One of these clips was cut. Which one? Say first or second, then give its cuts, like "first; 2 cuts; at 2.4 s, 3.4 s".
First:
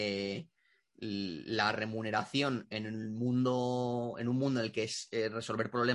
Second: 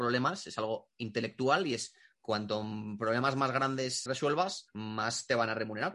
second; 1 cut; at 4.1 s